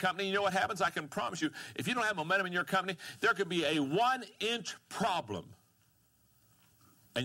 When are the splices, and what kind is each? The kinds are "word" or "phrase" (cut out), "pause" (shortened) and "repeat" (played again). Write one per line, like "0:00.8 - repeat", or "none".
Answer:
none